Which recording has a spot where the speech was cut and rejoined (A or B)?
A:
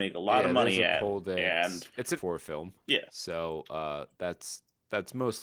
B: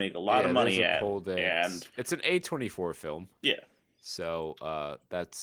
A